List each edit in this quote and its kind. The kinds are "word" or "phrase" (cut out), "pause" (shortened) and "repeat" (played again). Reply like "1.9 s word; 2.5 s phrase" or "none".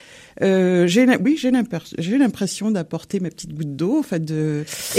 none